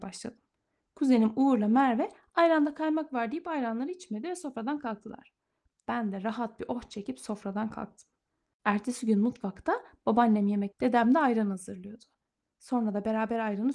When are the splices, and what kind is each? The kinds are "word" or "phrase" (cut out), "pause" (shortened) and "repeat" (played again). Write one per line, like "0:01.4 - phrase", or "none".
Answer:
0:10.7 - word